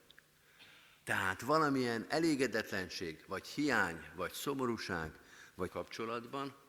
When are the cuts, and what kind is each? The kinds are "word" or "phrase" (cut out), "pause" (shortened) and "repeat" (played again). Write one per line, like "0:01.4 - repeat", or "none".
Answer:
0:05.7 - phrase

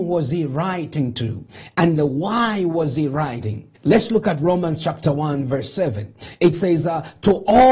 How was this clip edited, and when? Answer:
0:03.7 - pause

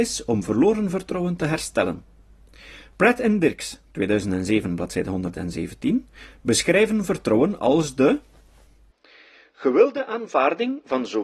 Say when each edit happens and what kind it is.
none

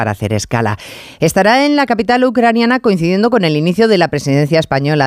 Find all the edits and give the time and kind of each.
none

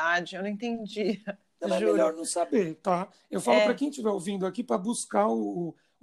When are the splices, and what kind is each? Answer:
none

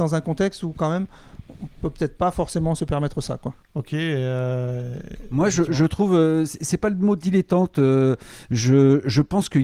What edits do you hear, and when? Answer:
0:03.6 - pause

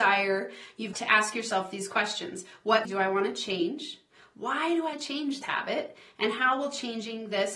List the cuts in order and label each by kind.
0:00.9 - word
0:02.8 - word
0:04.9 - word
0:05.4 - word

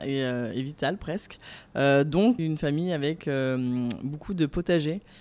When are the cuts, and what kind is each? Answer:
0:02.4 - phrase

